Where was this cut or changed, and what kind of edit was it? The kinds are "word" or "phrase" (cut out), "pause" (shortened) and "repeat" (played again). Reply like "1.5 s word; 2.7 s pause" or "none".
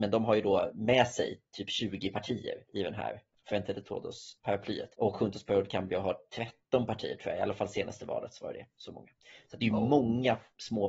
4.9 s pause

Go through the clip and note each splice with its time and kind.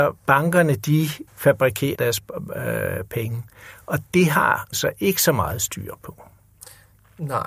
1.3 s word; 1.9 s word; 4.7 s word

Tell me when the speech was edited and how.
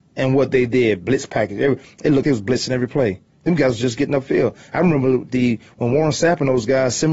2.2 s word

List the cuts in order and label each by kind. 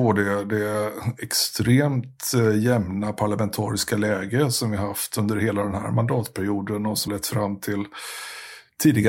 7.1 s word

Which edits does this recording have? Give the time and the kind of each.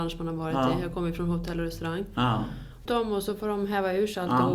2.9 s phrase

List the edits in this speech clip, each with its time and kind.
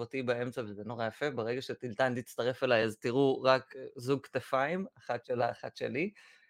none

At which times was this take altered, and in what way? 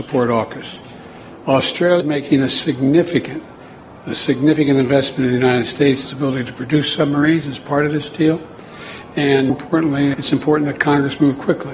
2.0 s word; 6.1 s word; 9.5 s word; 10.1 s word

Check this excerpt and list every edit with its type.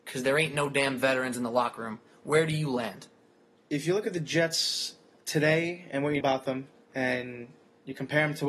6.2 s word

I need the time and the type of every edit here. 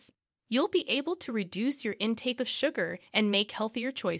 3.1 s pause

